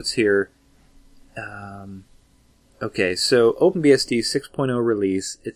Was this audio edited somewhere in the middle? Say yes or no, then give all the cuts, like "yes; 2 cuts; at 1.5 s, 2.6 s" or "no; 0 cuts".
no; 0 cuts